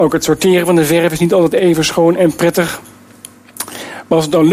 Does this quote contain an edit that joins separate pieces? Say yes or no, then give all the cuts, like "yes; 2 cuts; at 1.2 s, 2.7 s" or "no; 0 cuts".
yes; 2 cuts; at 1.6 s, 2.2 s